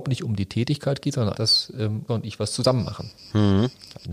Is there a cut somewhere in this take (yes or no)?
yes